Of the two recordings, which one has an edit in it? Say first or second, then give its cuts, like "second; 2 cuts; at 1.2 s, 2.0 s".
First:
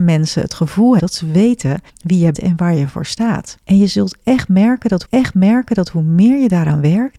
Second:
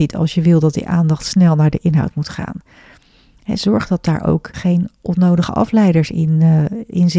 first; 5 cuts; at 1.0 s, 1.9 s, 2.3 s, 3.6 s, 5.0 s